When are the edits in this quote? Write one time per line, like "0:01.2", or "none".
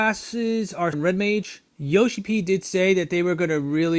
0:00.9
0:01.7